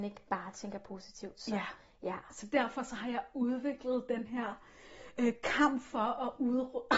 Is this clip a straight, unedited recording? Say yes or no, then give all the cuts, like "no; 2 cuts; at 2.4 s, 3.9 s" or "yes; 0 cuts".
yes; 0 cuts